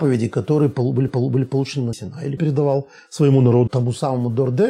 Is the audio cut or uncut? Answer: cut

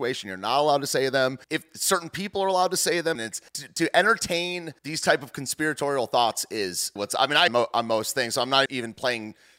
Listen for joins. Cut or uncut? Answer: cut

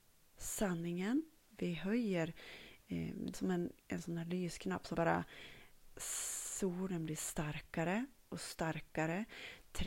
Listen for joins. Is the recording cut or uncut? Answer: cut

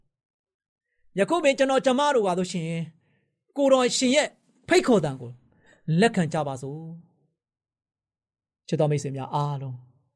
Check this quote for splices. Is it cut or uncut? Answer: uncut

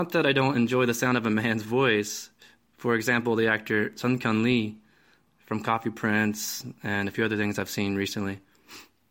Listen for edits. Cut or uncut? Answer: uncut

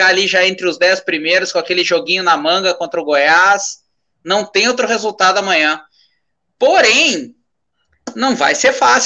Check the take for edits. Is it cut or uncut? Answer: uncut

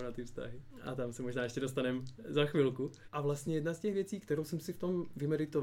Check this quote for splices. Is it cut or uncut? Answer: uncut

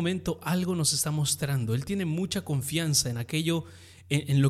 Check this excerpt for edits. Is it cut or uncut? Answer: uncut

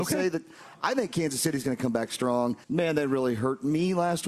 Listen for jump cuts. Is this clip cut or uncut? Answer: cut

